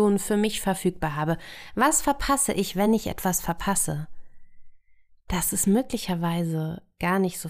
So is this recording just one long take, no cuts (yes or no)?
yes